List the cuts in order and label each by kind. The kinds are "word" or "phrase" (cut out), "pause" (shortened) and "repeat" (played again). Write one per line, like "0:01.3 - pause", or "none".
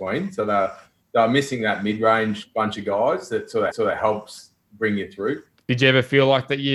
0:03.7 - repeat